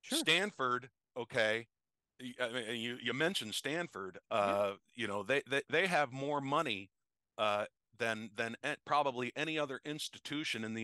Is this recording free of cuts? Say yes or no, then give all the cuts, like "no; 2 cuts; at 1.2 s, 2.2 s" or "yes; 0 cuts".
yes; 0 cuts